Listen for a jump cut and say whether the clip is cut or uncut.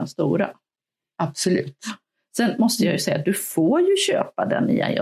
uncut